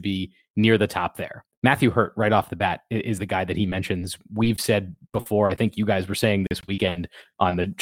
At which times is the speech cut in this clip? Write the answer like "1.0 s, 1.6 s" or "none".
1.5 s